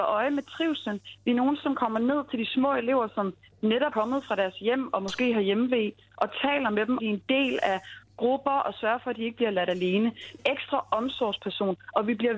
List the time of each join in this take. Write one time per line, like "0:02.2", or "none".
0:03.9
0:07.0
0:10.4